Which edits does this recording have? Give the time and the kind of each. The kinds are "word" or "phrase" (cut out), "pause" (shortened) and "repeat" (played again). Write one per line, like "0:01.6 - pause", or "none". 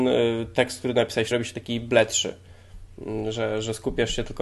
0:01.3 - word